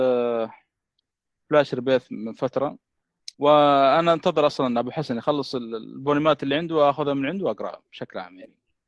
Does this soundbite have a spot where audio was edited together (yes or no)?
yes